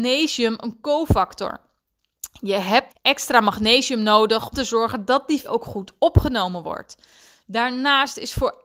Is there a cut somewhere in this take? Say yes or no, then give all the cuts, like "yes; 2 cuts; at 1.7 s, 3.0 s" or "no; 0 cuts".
yes; 3 cuts; at 2.9 s, 4.5 s, 5.4 s